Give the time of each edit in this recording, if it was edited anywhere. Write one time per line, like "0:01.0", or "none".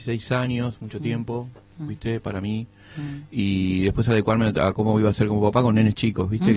none